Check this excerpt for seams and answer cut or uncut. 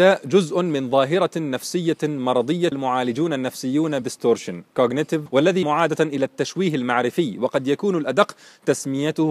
cut